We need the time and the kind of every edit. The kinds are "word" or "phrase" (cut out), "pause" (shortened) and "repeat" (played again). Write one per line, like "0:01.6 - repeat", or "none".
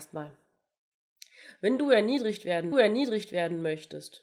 0:02.7 - repeat